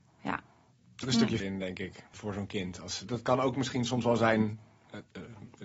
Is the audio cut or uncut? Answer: cut